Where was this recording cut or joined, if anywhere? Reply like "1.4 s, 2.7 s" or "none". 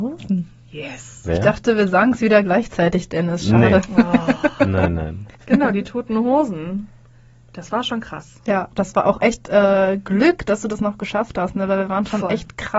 5.3 s